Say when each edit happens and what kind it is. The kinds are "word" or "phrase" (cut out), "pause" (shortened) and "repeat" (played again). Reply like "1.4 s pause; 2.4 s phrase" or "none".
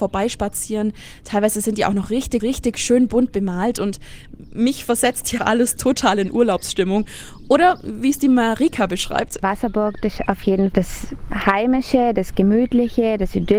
2.4 s repeat; 5.4 s word; 10.7 s word